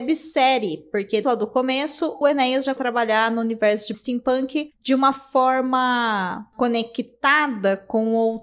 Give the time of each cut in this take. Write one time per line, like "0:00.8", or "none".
0:01.2
0:02.2
0:02.8
0:03.9